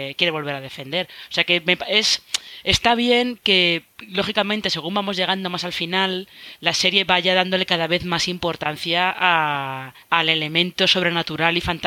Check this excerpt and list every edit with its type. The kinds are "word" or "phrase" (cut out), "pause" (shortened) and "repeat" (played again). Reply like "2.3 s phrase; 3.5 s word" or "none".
10.0 s pause